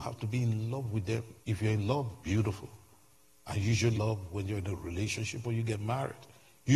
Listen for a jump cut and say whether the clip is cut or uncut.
cut